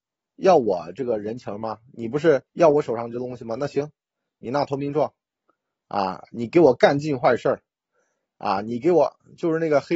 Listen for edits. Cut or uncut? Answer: cut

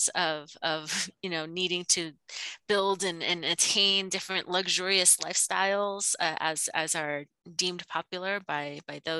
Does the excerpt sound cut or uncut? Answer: uncut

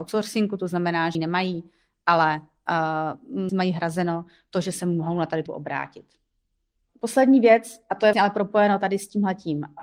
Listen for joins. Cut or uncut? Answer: cut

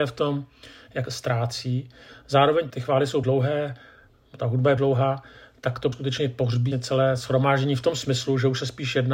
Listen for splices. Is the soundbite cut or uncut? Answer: cut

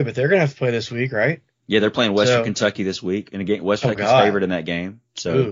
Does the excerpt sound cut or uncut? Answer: cut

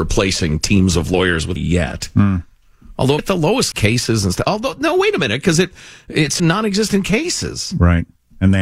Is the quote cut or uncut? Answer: cut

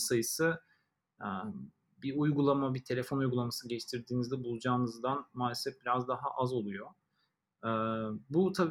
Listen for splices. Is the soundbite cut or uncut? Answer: uncut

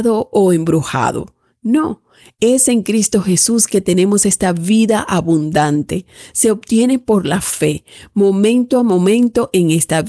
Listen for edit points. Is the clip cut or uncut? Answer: uncut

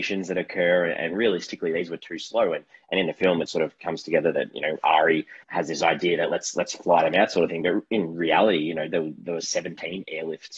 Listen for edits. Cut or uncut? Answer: cut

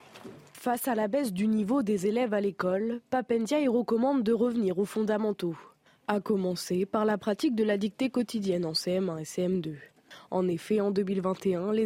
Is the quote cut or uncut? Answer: uncut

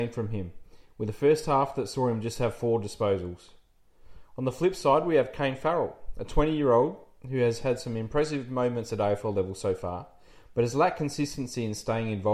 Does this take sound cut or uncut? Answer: uncut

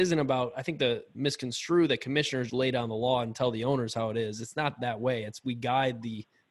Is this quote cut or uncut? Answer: cut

